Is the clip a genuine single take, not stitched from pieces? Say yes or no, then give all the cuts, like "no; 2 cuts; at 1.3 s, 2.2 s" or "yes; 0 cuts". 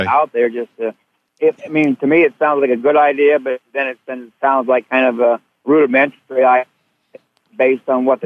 yes; 0 cuts